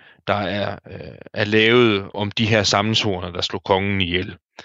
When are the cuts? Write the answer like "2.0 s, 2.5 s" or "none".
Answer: 2.1 s